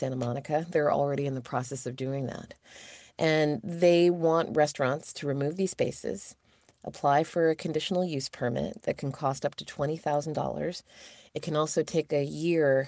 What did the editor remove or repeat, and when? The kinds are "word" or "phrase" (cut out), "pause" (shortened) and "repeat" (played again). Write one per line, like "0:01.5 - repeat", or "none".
none